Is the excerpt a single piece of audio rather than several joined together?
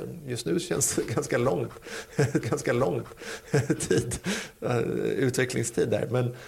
no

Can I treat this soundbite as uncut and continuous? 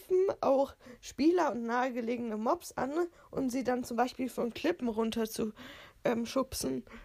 yes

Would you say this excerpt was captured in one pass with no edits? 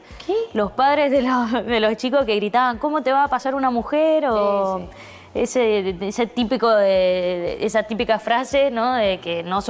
yes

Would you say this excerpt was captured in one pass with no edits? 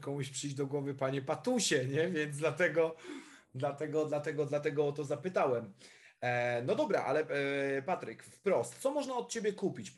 yes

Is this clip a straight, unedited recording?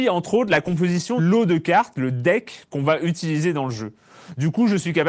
no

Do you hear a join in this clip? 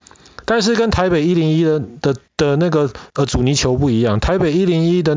yes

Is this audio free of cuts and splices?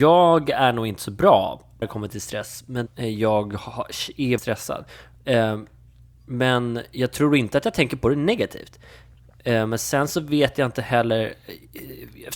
no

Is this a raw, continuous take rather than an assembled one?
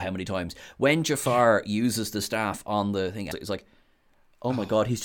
no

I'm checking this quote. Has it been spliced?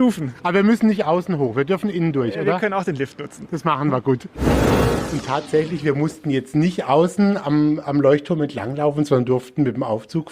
no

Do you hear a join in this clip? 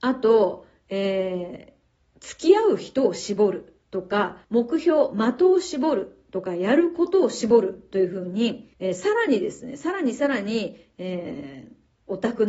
yes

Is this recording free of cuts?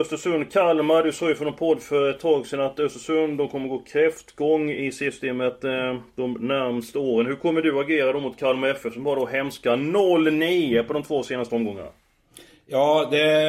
yes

